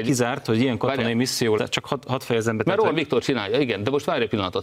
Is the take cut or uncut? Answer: cut